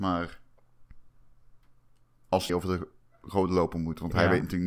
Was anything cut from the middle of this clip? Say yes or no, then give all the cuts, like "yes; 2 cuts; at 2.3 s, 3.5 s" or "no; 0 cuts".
yes; 1 cut; at 2.5 s